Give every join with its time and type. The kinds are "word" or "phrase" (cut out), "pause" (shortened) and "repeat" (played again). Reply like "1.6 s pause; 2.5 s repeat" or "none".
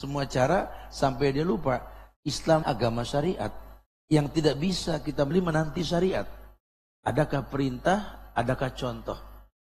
2.6 s word; 3.9 s pause; 5.3 s phrase